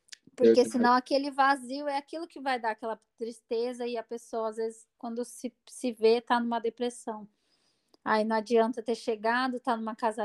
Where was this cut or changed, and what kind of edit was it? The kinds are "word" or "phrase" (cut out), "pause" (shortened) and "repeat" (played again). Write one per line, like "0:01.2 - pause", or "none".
none